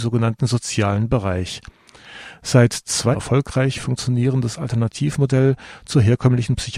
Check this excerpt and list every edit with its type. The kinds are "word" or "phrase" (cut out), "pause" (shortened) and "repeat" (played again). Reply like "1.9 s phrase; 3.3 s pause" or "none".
3.1 s phrase